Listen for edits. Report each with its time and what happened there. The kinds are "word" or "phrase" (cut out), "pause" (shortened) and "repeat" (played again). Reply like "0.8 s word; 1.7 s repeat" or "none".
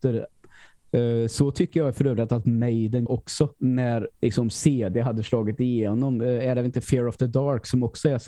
3.1 s word; 4.1 s pause